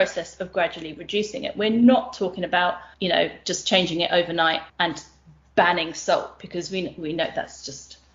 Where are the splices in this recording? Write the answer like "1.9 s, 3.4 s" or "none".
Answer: 2.9 s, 4.7 s